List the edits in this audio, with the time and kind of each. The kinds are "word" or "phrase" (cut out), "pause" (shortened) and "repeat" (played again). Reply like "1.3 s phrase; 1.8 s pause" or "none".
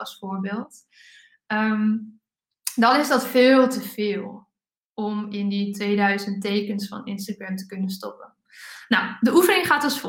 none